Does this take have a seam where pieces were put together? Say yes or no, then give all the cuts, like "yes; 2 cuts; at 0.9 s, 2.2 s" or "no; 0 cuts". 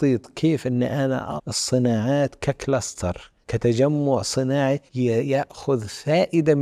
yes; 3 cuts; at 1.4 s, 3.4 s, 4.9 s